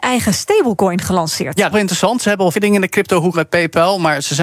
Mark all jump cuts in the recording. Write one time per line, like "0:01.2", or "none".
0:01.7
0:02.5
0:03.3

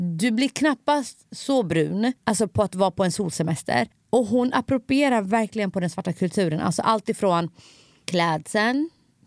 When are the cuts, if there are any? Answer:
0:02.2
0:03.9

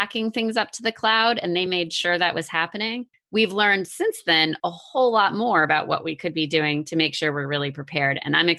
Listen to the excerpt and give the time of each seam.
none

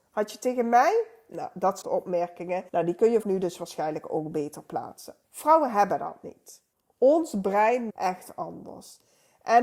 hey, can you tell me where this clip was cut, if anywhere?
0:01.8
0:02.7
0:03.2
0:05.2
0:06.7
0:07.9

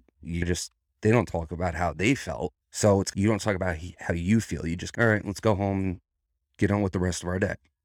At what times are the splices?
0:02.6

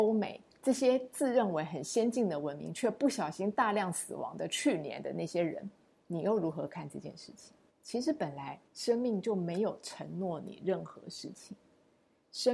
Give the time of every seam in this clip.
0:05.9
0:07.7
0:08.7

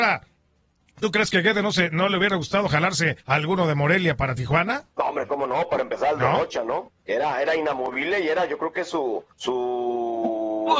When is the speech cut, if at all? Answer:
0:03.2
0:04.9
0:09.3

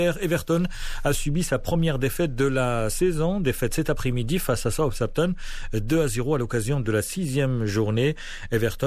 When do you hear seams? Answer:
none

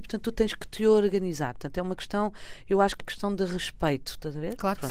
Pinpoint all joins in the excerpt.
0:03.0

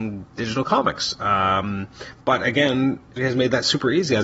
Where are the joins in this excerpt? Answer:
0:03.2

